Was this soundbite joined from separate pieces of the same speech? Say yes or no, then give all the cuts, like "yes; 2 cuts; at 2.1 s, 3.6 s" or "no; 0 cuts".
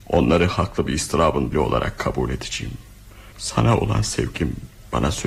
yes; 2 cuts; at 1.5 s, 3.3 s